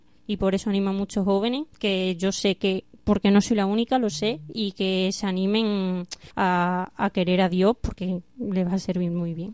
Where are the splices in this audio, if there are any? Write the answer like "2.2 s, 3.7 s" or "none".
1.7 s, 6.3 s